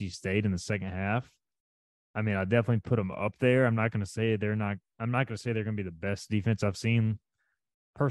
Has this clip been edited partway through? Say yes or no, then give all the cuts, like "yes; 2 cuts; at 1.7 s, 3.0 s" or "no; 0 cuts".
no; 0 cuts